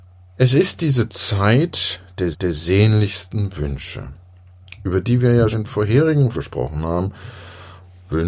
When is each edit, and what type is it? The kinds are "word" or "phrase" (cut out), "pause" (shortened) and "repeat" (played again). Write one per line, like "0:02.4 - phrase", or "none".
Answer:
0:02.3 - repeat
0:05.5 - word
0:06.3 - word